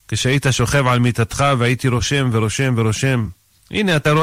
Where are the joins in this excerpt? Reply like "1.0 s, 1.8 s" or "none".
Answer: none

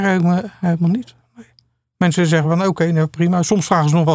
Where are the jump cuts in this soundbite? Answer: none

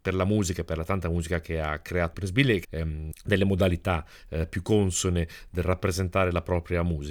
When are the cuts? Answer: 2.1 s, 2.6 s, 3.1 s

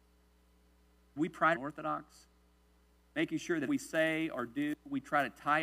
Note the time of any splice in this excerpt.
1.2 s, 1.5 s, 3.7 s

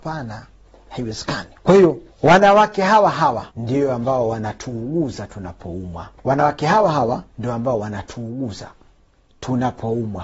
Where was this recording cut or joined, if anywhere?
1.6 s, 2.1 s, 3.5 s, 6.2 s, 7.3 s

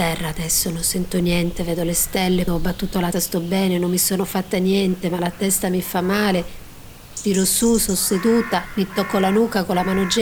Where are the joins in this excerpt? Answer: 2.5 s, 3.1 s

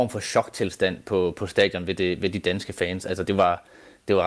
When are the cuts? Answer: none

